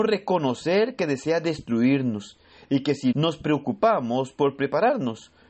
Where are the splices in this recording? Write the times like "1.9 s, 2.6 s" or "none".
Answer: 3.1 s